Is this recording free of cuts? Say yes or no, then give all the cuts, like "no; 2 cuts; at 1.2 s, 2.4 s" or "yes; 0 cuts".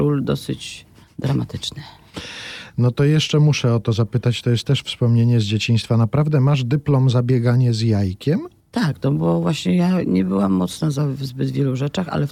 no; 2 cuts; at 1.0 s, 8.6 s